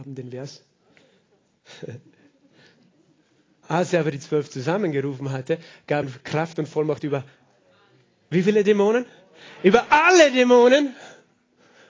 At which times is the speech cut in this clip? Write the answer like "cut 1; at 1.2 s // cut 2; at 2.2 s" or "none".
cut 1; at 6.0 s